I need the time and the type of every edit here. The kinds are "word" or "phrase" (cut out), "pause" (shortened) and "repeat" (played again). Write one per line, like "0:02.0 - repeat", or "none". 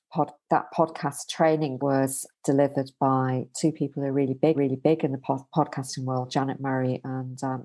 0:01.8 - word
0:02.3 - word
0:04.5 - repeat